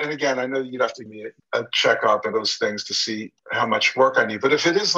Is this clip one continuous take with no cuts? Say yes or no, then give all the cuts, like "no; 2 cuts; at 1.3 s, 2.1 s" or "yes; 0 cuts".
no; 4 cuts; at 1.1 s, 1.4 s, 2.3 s, 3.4 s